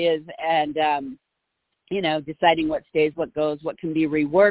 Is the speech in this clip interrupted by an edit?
no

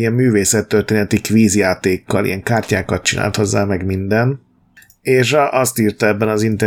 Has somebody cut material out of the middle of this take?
no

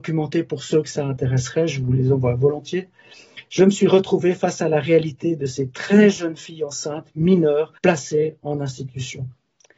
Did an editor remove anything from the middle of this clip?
yes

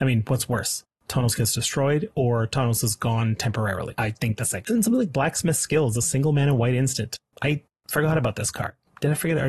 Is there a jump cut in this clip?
no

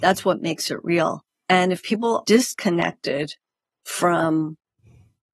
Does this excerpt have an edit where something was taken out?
yes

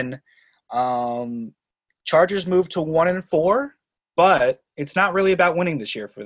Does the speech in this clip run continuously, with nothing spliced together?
yes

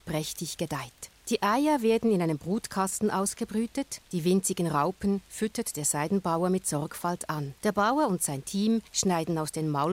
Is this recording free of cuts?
no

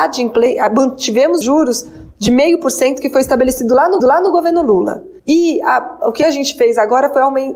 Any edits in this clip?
yes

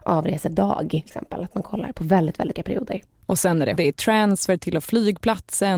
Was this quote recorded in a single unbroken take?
no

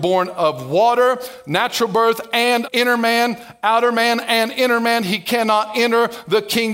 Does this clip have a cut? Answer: yes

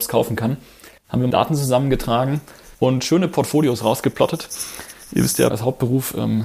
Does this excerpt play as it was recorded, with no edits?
no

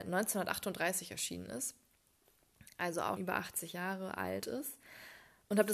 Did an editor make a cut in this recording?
yes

